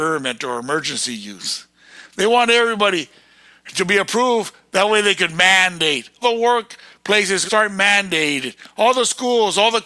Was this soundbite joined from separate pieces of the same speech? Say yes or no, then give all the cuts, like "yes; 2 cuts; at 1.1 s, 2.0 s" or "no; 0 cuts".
yes; 3 cuts; at 3.7 s, 6.2 s, 7.5 s